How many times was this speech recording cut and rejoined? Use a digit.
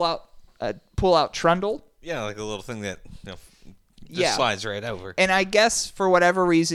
0